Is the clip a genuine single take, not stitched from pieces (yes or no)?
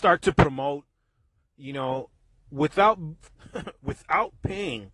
no